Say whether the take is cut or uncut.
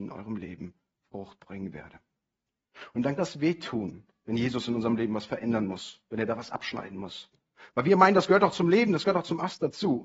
cut